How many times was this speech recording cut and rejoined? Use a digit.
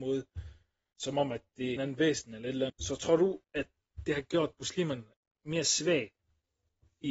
3